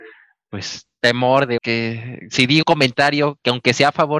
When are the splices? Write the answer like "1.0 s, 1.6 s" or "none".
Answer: 1.6 s, 2.6 s